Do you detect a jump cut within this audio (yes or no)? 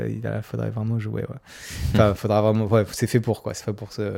yes